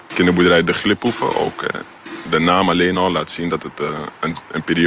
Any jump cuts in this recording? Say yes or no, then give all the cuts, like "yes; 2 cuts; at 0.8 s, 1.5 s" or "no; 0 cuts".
no; 0 cuts